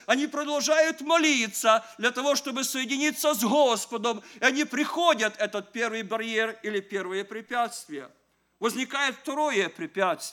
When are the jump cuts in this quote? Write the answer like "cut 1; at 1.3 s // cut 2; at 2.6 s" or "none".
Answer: none